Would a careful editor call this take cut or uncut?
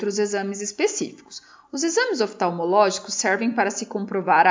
uncut